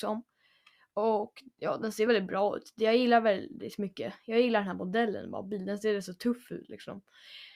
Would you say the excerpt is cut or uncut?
uncut